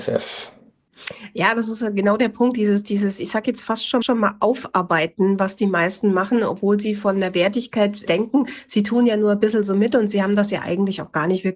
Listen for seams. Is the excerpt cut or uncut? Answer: cut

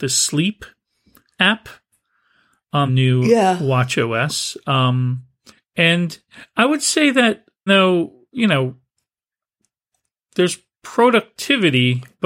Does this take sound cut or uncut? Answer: cut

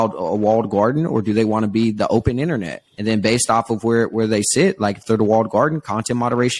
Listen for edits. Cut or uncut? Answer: cut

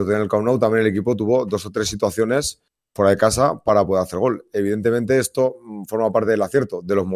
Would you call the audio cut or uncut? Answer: uncut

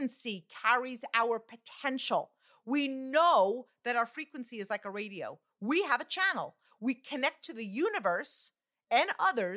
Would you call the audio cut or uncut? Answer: uncut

